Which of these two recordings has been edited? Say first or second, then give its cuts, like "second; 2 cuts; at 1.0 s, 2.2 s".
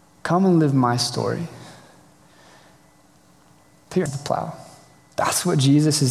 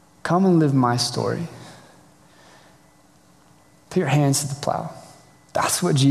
first; 1 cut; at 4.1 s